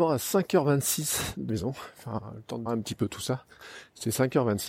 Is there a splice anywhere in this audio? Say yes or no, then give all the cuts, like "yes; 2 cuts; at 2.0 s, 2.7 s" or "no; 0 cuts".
yes; 2 cuts; at 1.5 s, 2.7 s